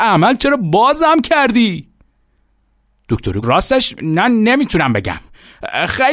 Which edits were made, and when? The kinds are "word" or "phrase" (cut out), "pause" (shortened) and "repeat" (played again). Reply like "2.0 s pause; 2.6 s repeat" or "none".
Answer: 3.4 s word; 4.0 s word